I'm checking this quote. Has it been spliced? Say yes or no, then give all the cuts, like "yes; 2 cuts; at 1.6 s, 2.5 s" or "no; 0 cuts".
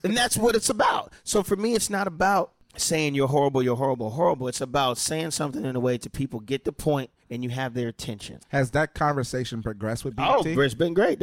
yes; 2 cuts; at 7.2 s, 8.4 s